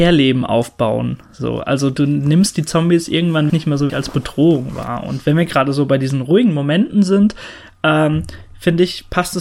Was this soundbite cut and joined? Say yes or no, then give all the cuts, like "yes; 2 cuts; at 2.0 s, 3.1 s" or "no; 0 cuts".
yes; 2 cuts; at 3.5 s, 3.9 s